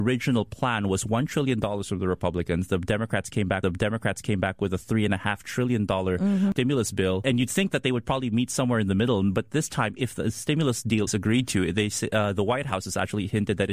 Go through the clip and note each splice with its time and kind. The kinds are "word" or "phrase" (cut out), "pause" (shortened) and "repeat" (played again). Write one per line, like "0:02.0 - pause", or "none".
0:03.6 - repeat
0:11.1 - word

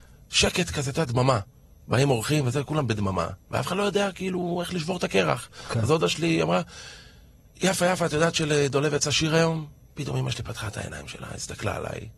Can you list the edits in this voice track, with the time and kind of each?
none

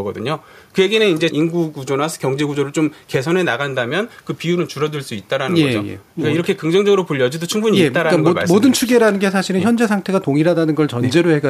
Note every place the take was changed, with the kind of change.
0:01.3 - phrase

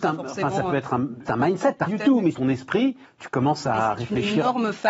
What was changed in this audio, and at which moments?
0:01.2 - word
0:01.9 - phrase
0:02.3 - phrase
0:03.0 - pause

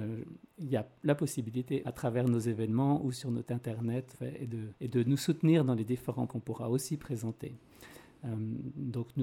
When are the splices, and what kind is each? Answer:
0:01.8 - phrase
0:03.4 - word
0:04.1 - phrase
0:04.8 - pause
0:06.3 - word

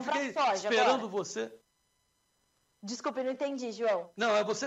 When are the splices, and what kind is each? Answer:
none

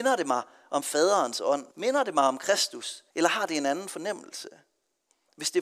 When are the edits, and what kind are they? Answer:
0:01.7 - pause
0:03.1 - pause

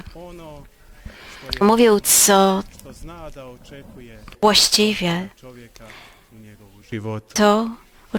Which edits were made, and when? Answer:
0:01.6 - word
0:02.0 - word

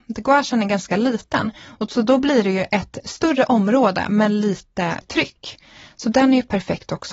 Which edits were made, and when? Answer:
0:03.0 - word
0:05.0 - word

